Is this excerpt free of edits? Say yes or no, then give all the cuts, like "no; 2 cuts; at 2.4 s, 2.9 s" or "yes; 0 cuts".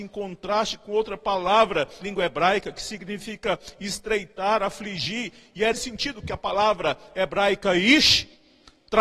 no; 2 cuts; at 2.0 s, 5.7 s